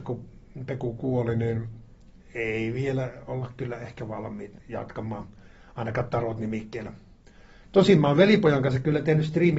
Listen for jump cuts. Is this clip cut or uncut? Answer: uncut